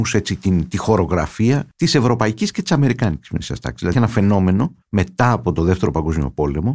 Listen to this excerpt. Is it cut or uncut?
cut